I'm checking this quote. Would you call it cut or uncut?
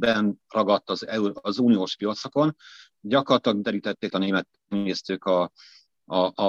cut